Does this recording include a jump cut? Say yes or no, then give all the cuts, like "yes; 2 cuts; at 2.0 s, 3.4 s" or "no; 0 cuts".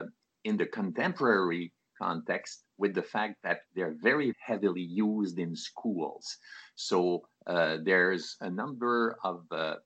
yes; 2 cuts; at 3.7 s, 4.3 s